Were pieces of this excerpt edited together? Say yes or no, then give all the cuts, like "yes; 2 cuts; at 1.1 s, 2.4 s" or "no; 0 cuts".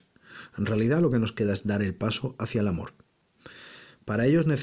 no; 0 cuts